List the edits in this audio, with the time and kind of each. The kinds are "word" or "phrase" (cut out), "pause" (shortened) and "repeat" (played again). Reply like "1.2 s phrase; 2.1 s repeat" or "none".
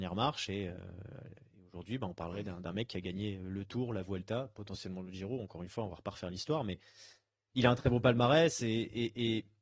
none